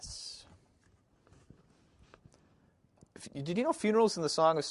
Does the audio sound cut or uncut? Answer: uncut